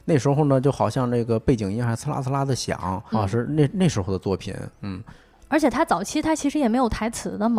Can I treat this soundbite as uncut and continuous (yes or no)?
no